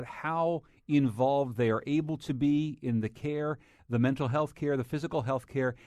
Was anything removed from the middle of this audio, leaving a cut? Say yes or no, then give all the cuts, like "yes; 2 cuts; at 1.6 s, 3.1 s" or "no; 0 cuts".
no; 0 cuts